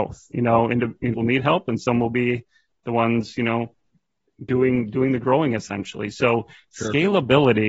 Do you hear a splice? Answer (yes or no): yes